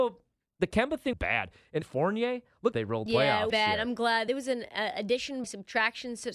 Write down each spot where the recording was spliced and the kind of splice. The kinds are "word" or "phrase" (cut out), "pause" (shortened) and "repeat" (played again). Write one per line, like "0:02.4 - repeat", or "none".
0:01.1 - word
0:01.8 - word
0:02.7 - phrase
0:03.1 - phrase
0:03.5 - word
0:04.3 - word
0:05.4 - word